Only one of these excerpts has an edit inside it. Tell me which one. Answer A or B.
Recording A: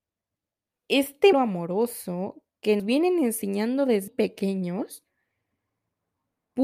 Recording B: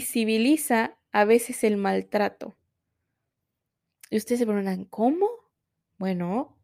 A